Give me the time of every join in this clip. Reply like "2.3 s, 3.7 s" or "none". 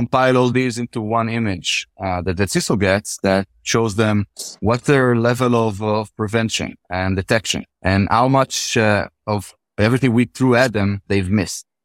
4.6 s, 7.7 s, 9.6 s